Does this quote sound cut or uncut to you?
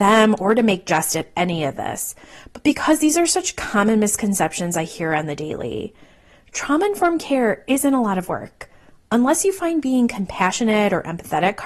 uncut